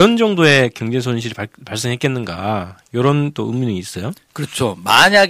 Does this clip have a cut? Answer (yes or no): no